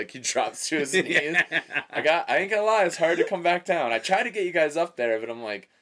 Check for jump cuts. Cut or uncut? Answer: uncut